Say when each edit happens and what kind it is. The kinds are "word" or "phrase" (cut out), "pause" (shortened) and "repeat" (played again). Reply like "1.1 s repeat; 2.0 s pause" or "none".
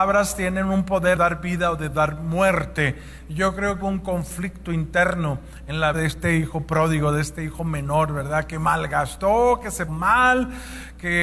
1.2 s word; 3.8 s word; 5.9 s word; 9.9 s word